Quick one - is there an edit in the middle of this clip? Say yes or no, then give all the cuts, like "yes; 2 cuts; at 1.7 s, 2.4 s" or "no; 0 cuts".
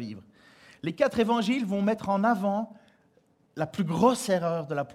no; 0 cuts